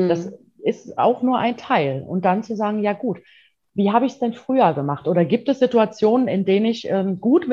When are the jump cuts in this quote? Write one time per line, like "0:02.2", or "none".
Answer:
none